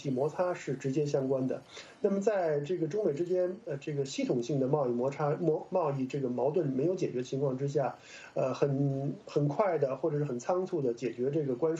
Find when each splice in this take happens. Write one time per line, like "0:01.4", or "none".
none